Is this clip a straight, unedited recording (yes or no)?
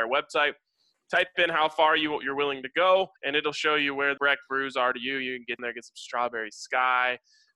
no